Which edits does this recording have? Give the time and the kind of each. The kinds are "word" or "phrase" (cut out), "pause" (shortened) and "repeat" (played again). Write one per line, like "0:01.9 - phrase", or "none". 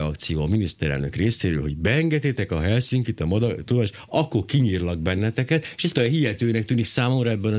0:05.9 - word